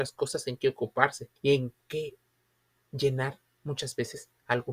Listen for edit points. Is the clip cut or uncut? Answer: cut